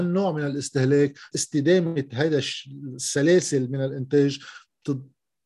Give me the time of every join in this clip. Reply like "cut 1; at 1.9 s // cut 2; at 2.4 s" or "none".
cut 1; at 1.3 s

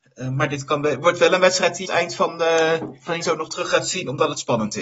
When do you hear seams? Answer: cut 1; at 1.8 s // cut 2; at 3.2 s

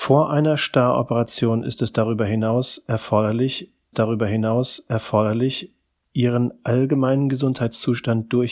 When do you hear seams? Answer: cut 1; at 3.9 s

